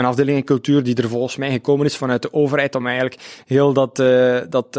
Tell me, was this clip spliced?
no; 0 cuts

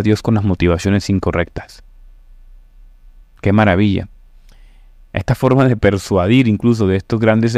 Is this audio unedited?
yes; 0 cuts

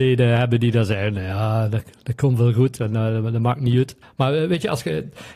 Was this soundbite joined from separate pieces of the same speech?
yes; 1 cut; at 4.0 s

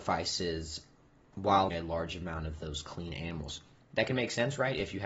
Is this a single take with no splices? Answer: no; 1 cut; at 1.7 s

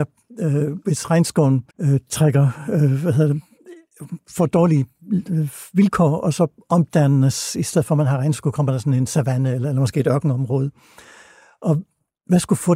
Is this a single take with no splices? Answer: no; 1 cut; at 1.7 s

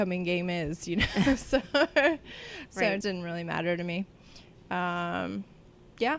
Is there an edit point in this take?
yes; 1 cut; at 3.0 s

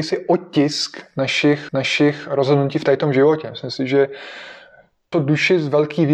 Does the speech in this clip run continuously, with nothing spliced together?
no; 2 cuts; at 1.7 s, 5.1 s

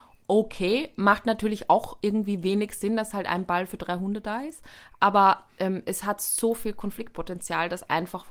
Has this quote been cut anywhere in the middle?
no; 0 cuts

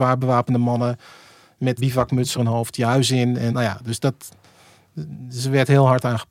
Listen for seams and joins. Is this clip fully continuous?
no; 3 cuts; at 1.8 s, 2.3 s, 3.5 s

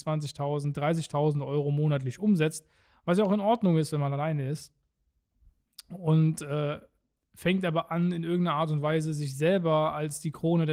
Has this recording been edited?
no; 0 cuts

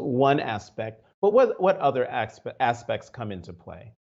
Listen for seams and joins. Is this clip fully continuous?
yes; 0 cuts

